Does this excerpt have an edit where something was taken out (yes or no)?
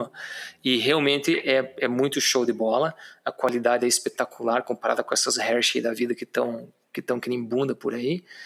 no